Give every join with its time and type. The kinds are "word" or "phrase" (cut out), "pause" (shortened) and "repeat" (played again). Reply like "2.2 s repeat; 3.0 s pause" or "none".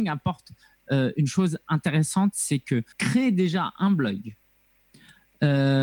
2.9 s pause